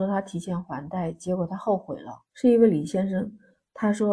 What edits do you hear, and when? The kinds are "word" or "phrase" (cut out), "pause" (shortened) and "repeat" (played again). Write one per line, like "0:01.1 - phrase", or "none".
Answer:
0:02.3 - pause